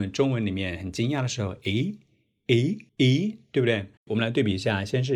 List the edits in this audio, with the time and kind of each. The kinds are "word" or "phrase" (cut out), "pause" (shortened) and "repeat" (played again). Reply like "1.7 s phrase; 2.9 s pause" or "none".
2.9 s pause; 4.0 s pause